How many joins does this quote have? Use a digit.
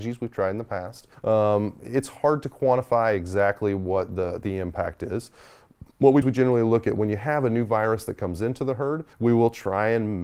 3